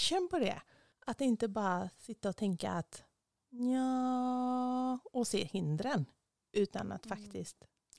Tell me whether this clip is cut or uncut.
uncut